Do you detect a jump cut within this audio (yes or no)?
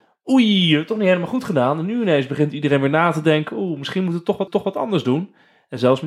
yes